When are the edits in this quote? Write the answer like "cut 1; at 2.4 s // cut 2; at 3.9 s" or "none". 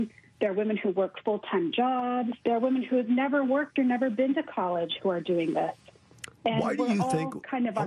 cut 1; at 2.4 s